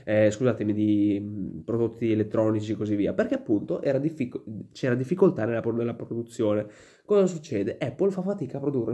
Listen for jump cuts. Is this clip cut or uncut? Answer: uncut